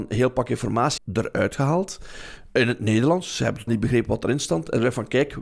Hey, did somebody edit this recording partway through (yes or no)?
yes